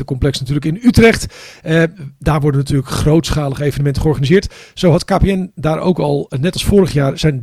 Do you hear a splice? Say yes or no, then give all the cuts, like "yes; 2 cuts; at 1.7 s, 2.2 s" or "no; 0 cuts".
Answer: no; 0 cuts